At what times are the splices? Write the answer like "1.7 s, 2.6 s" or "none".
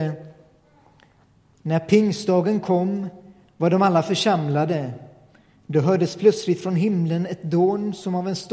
none